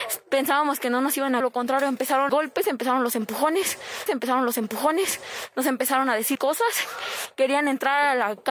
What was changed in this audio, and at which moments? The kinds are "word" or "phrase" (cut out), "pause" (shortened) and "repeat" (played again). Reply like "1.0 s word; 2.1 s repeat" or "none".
1.4 s phrase; 2.3 s word; 4.1 s repeat; 6.4 s word